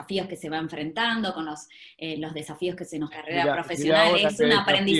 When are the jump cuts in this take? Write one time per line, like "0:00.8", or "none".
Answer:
0:03.1